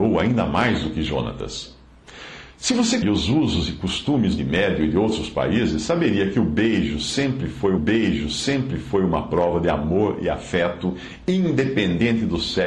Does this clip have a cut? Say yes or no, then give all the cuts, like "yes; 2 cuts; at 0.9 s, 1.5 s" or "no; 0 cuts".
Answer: yes; 3 cuts; at 3.0 s, 4.4 s, 7.8 s